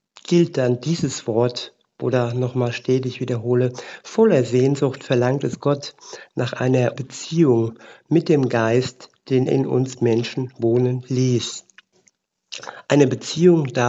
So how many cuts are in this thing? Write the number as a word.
two